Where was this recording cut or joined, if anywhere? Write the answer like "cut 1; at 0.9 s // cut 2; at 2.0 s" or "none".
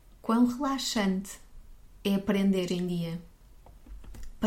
cut 1; at 2.7 s